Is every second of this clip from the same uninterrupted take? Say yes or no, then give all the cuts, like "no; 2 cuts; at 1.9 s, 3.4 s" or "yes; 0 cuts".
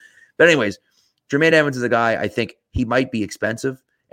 yes; 0 cuts